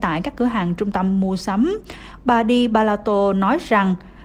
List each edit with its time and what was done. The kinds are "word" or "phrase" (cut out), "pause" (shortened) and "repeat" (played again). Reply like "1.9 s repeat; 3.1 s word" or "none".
none